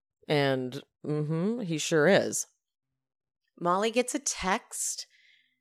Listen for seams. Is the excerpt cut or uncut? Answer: uncut